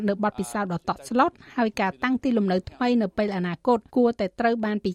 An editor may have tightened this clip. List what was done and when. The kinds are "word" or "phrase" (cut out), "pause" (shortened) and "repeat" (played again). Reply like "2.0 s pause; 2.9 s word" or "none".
3.9 s pause